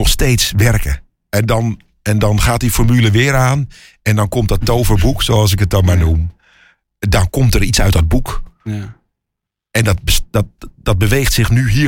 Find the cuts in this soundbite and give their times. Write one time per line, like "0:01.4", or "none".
none